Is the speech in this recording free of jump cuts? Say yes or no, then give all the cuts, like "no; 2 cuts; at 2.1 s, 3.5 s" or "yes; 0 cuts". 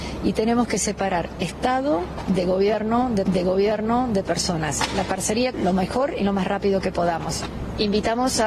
no; 2 cuts; at 3.3 s, 5.5 s